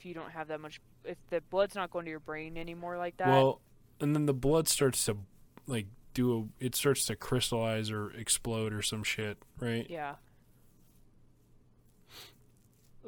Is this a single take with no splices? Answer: yes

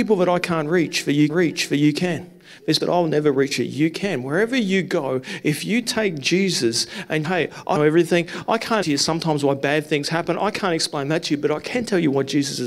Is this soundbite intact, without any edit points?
no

